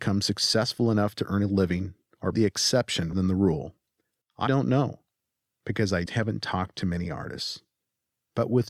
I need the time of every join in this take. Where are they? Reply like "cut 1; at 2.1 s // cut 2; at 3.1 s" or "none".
cut 1; at 2.3 s // cut 2; at 3.1 s // cut 3; at 4.5 s // cut 4; at 6.1 s